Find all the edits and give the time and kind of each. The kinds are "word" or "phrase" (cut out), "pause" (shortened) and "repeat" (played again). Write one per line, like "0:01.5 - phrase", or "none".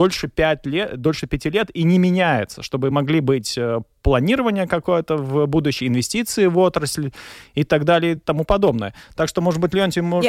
none

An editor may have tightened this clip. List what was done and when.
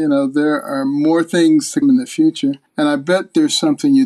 0:01.8 - word
0:02.7 - pause

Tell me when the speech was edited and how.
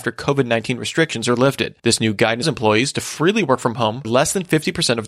0:01.8 - pause
0:02.4 - word
0:04.0 - word

